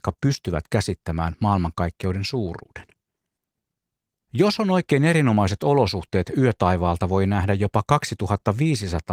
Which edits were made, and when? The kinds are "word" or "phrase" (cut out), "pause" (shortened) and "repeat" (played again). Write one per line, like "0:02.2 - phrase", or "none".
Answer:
none